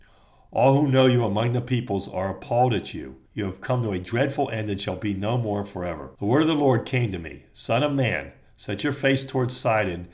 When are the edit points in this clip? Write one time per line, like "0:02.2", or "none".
0:03.3
0:06.2